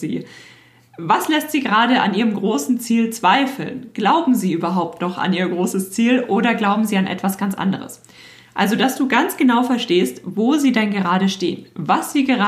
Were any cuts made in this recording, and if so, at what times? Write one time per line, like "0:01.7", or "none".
none